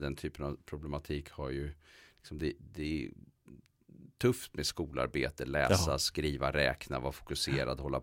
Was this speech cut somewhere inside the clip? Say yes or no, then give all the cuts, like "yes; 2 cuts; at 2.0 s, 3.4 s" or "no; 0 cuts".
no; 0 cuts